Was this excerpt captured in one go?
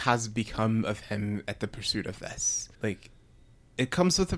no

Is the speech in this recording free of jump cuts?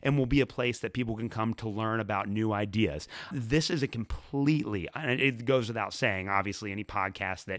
no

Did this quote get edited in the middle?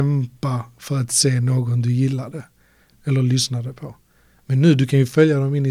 no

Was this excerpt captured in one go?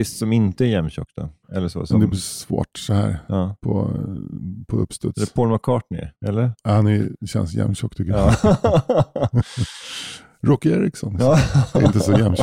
no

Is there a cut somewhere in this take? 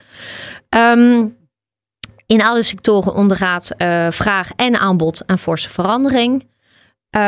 no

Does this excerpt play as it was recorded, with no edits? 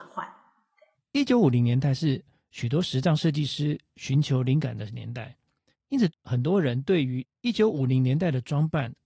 yes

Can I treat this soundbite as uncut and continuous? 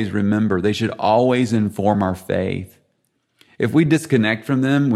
yes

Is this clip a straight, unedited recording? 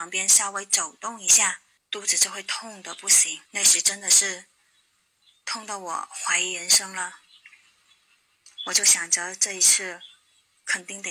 no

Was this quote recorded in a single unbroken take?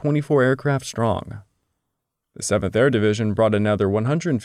yes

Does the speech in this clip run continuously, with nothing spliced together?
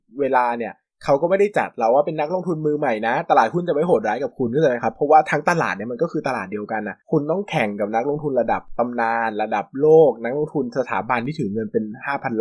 no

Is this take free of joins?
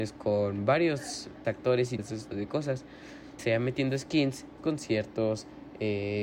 no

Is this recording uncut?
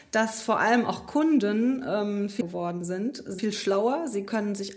no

